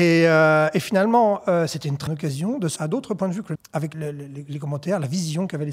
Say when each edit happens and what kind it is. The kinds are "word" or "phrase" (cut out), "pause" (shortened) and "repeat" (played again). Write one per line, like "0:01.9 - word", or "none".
0:02.1 - word
0:02.8 - word
0:03.5 - word
0:03.9 - word